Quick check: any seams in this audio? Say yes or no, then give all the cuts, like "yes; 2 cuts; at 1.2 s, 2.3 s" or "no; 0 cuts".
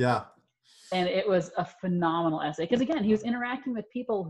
no; 0 cuts